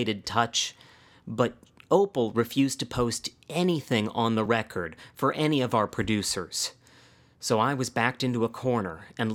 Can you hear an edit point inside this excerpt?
no; 0 cuts

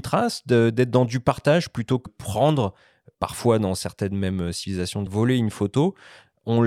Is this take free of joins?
no; 3 cuts; at 2.1 s, 3.1 s, 5.1 s

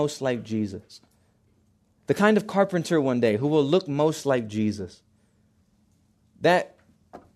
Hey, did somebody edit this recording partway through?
no; 0 cuts

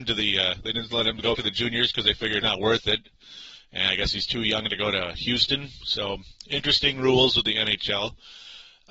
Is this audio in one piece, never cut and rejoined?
no; 2 cuts; at 1.3 s, 2.4 s

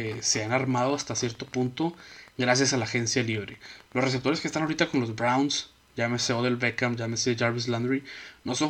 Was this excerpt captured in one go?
yes; 0 cuts

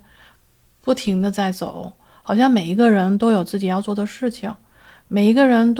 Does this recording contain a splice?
no; 0 cuts

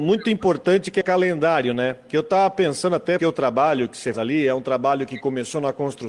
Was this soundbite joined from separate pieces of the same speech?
yes; 3 cuts; at 1.0 s, 3.2 s, 4.1 s

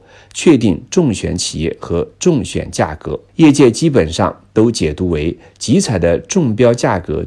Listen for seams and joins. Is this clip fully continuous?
no; 1 cut; at 3.3 s

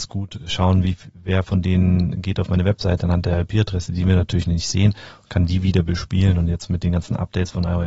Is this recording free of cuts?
yes; 0 cuts

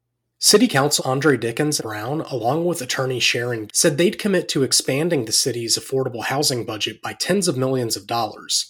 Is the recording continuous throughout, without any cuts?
no; 3 cuts; at 1.0 s, 1.8 s, 3.7 s

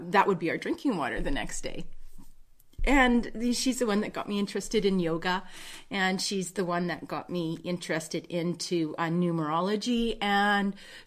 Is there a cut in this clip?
no; 0 cuts

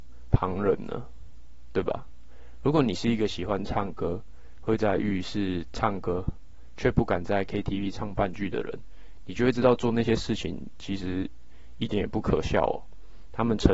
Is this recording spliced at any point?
no; 0 cuts

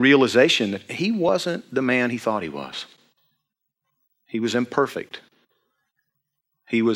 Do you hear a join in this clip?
no; 0 cuts

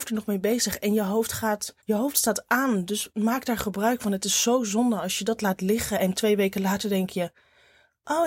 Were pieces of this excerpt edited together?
yes; 1 cut; at 1.8 s

